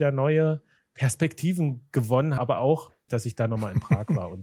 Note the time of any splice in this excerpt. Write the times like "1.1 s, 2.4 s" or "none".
2.4 s, 3.1 s

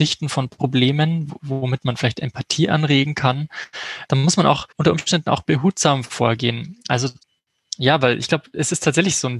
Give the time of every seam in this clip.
4.7 s

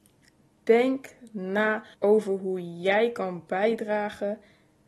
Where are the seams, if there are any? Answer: 1.9 s

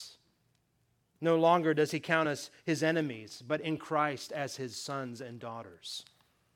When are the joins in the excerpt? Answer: none

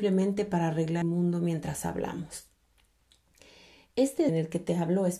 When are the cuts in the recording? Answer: 1.0 s, 4.3 s

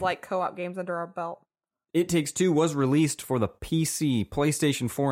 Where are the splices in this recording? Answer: none

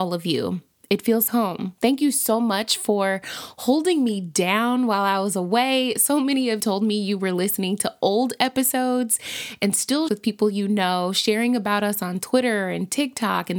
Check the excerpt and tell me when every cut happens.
1.3 s, 1.8 s, 6.6 s, 10.1 s

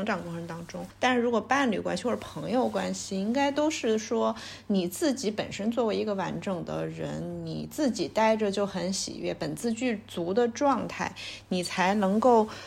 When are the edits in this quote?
0.9 s

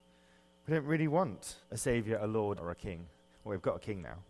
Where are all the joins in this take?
1.6 s, 2.6 s

